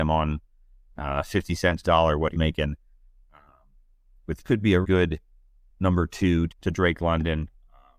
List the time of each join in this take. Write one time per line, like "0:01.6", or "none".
0:01.8
0:02.3
0:04.4
0:04.8
0:06.5